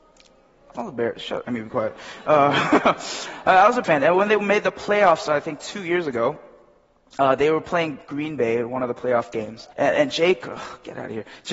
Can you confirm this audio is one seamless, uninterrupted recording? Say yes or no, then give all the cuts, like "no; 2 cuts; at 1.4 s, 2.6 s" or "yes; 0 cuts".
no; 3 cuts; at 1.4 s, 3.8 s, 9.7 s